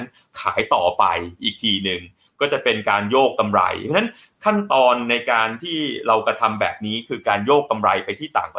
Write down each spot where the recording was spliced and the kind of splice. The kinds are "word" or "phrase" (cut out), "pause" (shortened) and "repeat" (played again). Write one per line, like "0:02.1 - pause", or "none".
none